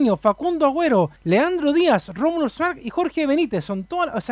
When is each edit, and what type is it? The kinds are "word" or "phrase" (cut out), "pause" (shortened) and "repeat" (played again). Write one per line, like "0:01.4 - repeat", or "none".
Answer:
0:01.2 - pause